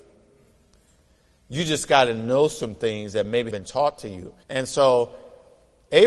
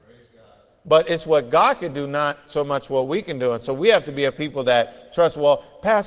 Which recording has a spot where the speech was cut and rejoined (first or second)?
first